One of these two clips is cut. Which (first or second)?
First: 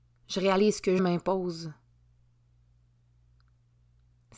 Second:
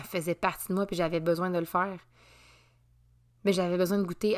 first